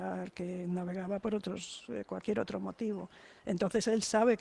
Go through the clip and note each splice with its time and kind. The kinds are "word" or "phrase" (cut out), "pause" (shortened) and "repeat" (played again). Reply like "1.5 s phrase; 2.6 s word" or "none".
none